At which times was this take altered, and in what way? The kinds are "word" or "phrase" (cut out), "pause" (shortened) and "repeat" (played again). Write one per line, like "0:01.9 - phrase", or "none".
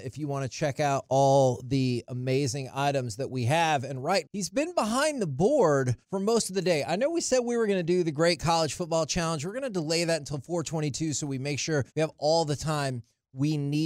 0:04.2 - word
0:06.0 - pause
0:11.9 - pause